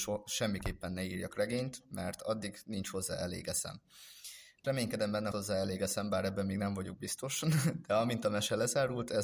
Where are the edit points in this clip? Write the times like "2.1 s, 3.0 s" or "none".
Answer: 4.6 s, 5.3 s